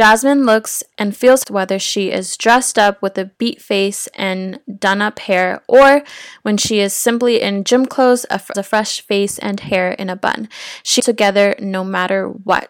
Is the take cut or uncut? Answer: cut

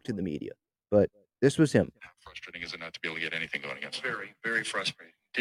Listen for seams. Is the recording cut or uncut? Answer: cut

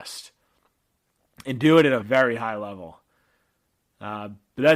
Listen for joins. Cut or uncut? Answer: cut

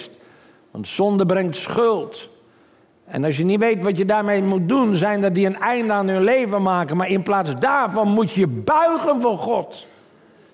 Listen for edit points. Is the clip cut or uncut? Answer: uncut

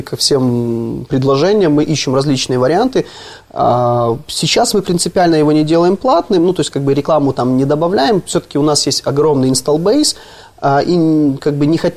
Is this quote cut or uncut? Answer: uncut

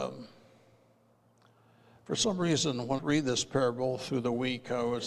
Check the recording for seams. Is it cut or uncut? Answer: cut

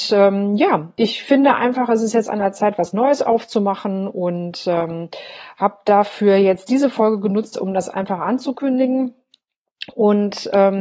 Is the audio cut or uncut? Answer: uncut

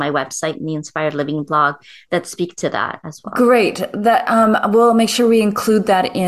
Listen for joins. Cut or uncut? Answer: uncut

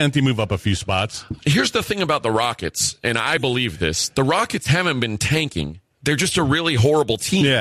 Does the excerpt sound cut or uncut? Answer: cut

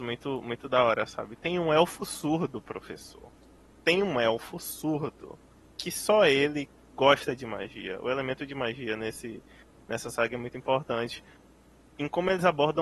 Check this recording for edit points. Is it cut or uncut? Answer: uncut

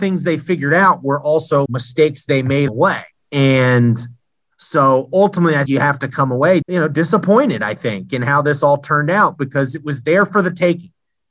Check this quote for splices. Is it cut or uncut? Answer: cut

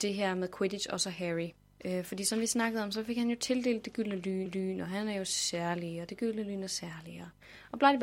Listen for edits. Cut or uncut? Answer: cut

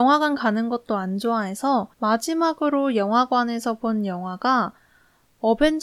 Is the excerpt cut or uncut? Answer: cut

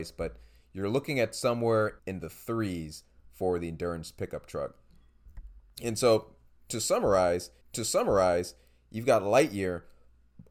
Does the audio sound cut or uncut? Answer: cut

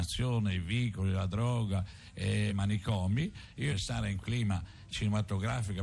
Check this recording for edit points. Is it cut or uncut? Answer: cut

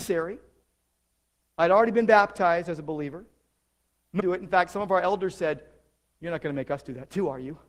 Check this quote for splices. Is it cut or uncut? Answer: cut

